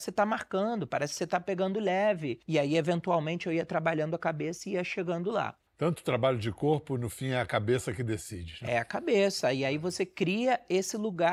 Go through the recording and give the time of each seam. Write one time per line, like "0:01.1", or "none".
0:02.4
0:05.7